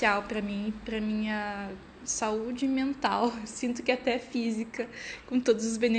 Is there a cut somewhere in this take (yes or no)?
no